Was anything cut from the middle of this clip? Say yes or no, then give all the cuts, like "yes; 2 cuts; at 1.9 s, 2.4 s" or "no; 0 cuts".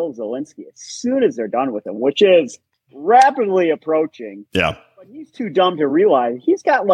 no; 0 cuts